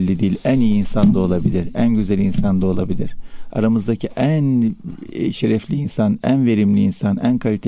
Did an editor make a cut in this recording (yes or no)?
no